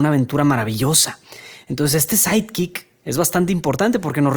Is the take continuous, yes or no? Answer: yes